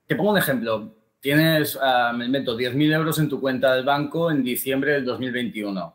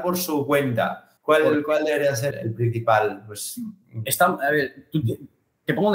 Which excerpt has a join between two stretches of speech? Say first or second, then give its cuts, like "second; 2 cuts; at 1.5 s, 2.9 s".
second; 2 cuts; at 1.2 s, 2.3 s